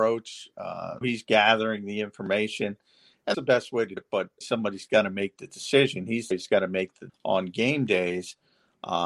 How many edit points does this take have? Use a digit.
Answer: 6